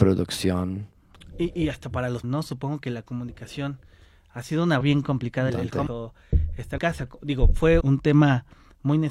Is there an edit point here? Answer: yes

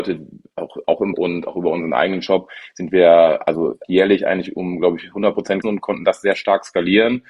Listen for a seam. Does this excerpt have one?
yes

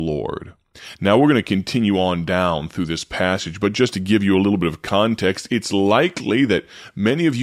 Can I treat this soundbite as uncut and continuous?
yes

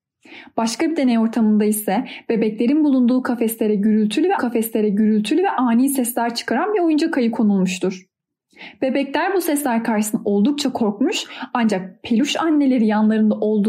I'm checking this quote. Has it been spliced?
yes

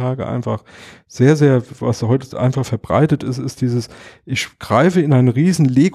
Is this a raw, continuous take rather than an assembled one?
yes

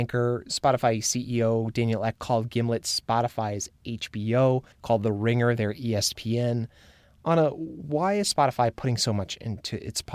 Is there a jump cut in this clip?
yes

